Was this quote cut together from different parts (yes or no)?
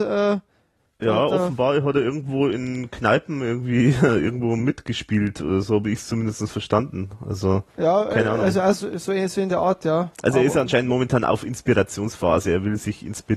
yes